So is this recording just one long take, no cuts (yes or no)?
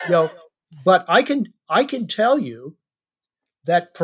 yes